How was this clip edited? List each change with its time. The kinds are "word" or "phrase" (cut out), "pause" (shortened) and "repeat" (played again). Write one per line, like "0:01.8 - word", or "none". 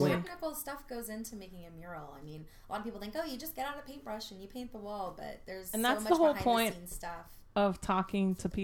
none